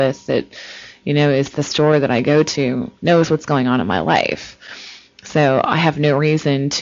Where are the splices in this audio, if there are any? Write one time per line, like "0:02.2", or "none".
0:01.5
0:03.0